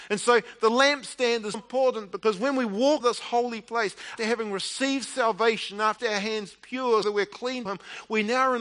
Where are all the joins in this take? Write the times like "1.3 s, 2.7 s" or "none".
1.5 s, 3.0 s, 4.2 s, 6.0 s, 7.0 s, 7.7 s